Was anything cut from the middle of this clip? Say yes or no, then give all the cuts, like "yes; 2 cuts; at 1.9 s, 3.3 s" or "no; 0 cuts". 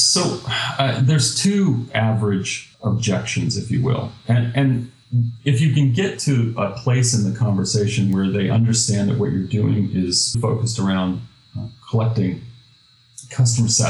yes; 2 cuts; at 2.7 s, 10.3 s